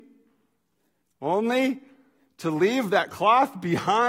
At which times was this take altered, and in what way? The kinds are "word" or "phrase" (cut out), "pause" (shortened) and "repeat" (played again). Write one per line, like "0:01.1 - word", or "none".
none